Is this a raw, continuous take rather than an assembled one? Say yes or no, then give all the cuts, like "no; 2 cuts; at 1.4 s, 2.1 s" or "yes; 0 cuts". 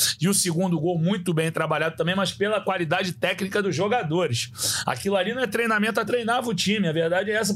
no; 1 cut; at 6.1 s